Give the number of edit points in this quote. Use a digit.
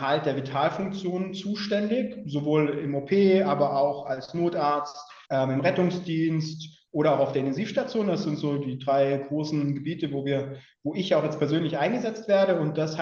1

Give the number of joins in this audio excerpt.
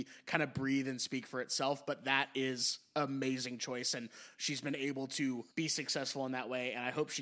1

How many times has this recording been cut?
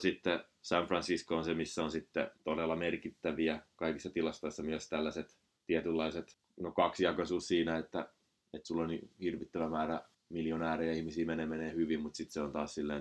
2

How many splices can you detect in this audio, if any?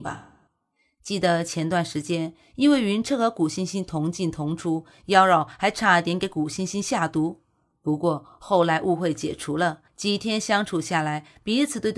1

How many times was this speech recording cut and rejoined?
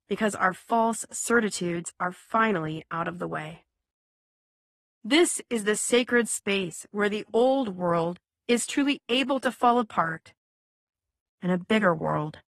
0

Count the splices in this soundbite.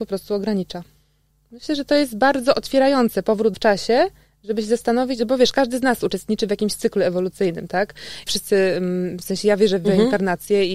2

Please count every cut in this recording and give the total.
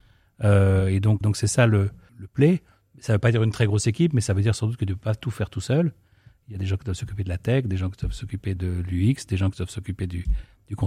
2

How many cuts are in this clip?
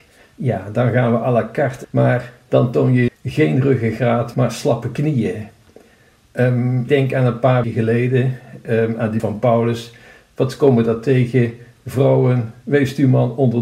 6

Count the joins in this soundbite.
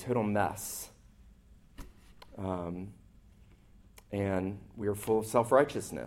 0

